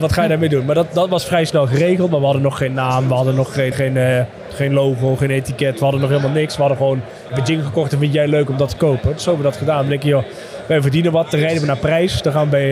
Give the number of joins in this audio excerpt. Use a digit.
2